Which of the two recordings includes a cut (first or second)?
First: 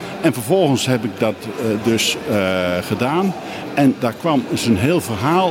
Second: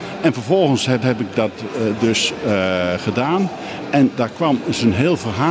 second